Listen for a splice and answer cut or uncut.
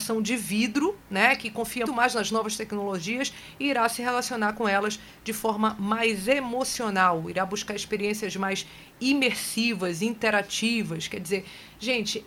cut